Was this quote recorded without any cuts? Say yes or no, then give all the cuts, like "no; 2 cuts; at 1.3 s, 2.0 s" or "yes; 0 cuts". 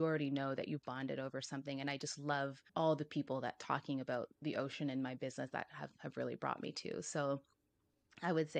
no; 1 cut; at 2.7 s